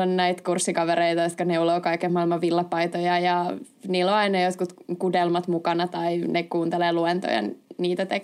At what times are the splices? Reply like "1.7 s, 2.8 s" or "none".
none